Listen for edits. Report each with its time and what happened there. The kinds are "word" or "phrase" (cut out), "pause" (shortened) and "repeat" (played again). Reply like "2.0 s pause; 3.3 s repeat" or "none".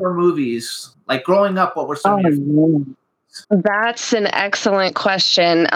0.9 s pause; 3.4 s pause